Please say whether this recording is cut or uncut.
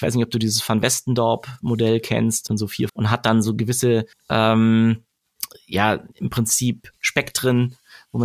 cut